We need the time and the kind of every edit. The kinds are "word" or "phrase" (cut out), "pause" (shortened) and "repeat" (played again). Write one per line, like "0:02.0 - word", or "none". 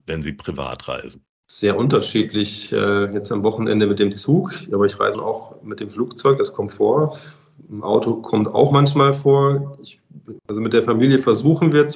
0:05.1 - word